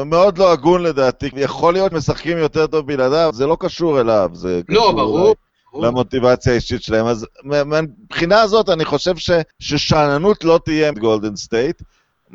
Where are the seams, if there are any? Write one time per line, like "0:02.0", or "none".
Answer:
0:01.3
0:01.9
0:03.3
0:09.5
0:10.9